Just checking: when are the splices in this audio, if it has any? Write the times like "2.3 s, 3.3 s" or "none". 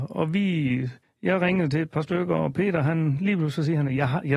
1.0 s